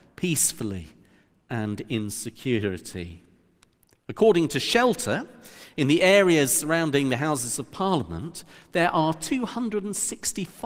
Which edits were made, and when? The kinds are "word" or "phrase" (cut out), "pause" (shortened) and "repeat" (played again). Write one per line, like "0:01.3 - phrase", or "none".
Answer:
none

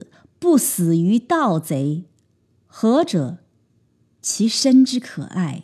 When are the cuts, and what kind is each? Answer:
none

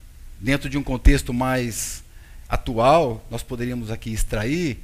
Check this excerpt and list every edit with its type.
none

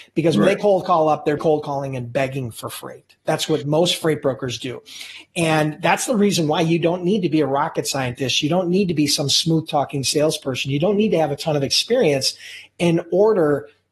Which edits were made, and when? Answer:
0:01.4 - word

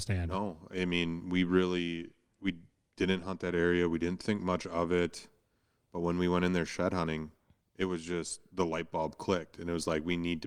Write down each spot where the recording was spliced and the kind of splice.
none

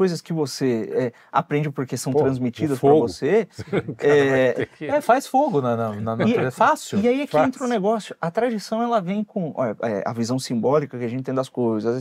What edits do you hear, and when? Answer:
none

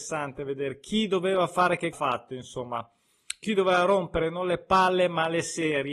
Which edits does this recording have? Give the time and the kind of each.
0:01.9 - phrase

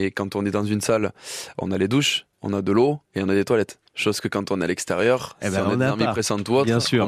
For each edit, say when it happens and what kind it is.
0:02.3 - pause
0:03.0 - pause
0:03.9 - pause

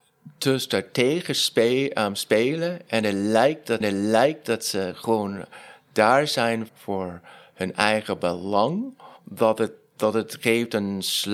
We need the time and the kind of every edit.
0:03.8 - repeat
0:06.7 - word
0:09.2 - pause

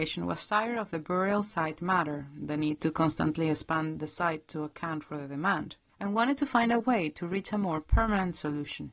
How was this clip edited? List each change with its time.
none

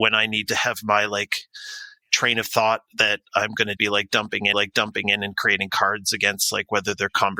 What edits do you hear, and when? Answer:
0:03.8 - word
0:04.5 - repeat

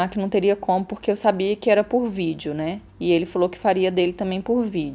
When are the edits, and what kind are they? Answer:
0:02.9 - pause

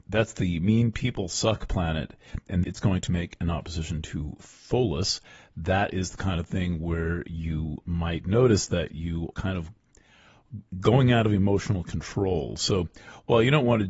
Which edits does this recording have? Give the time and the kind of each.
0:02.6 - word
0:09.3 - word
0:10.7 - pause

